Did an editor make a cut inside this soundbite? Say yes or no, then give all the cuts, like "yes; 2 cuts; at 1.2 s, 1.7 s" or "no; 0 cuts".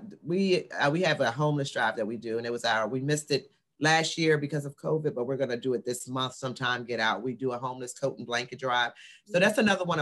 no; 0 cuts